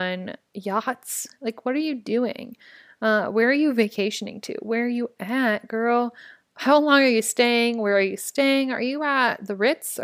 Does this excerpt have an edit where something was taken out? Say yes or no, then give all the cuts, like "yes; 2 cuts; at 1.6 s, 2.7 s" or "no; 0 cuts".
no; 0 cuts